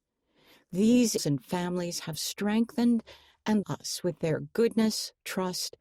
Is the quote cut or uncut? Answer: cut